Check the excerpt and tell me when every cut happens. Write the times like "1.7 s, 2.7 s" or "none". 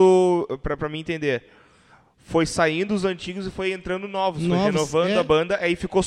none